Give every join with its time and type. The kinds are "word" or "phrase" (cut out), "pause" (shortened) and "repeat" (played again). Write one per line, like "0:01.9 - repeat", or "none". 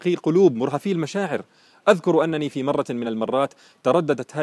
none